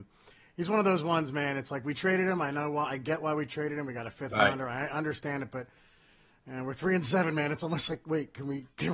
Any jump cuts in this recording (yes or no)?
no